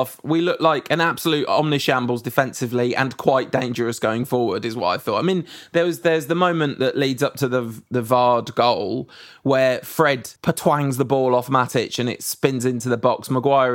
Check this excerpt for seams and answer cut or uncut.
cut